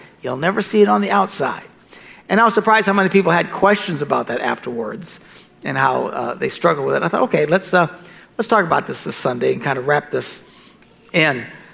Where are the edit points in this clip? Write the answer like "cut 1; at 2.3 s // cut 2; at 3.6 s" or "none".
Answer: none